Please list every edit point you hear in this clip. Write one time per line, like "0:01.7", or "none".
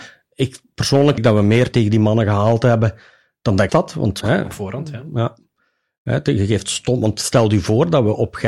0:01.2
0:01.7
0:03.7
0:04.2